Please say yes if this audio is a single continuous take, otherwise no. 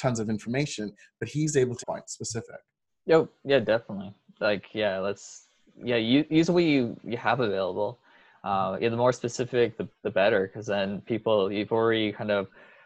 no